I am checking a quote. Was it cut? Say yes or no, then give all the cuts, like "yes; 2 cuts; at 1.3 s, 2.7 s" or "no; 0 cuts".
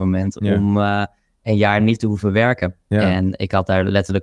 no; 0 cuts